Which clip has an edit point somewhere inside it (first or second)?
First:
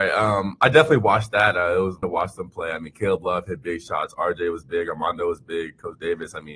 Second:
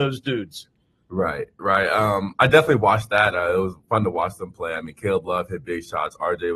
first